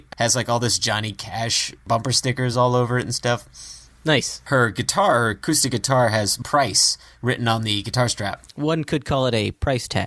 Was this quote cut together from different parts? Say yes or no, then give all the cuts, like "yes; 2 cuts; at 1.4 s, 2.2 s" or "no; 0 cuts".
no; 0 cuts